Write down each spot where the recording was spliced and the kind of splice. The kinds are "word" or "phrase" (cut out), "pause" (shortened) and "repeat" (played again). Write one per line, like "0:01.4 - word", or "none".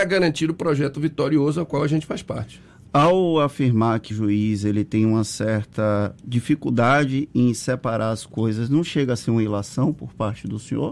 0:04.1 - word